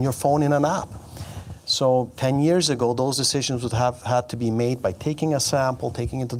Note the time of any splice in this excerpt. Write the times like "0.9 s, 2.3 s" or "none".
none